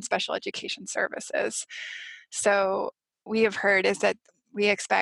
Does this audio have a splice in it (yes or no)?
yes